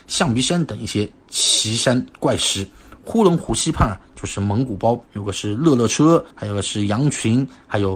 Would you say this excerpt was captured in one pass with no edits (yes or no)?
no